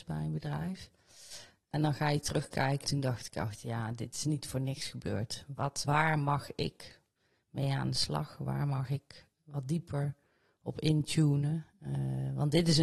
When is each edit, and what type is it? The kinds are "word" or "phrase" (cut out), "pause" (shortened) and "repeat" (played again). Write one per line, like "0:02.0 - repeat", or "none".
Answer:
0:02.8 - word
0:05.8 - word